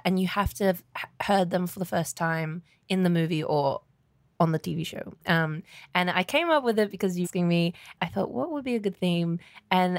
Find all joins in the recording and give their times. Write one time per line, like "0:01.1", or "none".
0:07.2
0:08.0